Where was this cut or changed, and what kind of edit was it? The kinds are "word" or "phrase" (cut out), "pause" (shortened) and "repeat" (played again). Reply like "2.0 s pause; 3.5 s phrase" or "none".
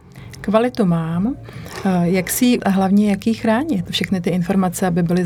2.6 s word